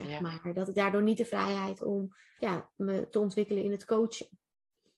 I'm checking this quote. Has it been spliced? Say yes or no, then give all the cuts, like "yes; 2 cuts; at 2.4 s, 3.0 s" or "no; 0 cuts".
yes; 2 cuts; at 1.8 s, 2.4 s